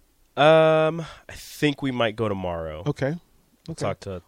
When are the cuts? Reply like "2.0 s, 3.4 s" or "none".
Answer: none